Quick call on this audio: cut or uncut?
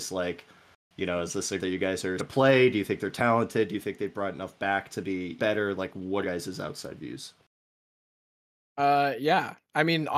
cut